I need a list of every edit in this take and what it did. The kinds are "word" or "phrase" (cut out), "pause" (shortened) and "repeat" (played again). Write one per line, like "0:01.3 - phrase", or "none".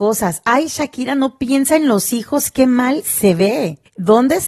none